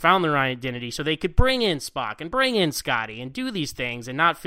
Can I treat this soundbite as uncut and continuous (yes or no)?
yes